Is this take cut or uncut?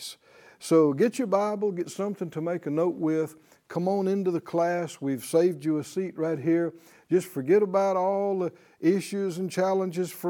uncut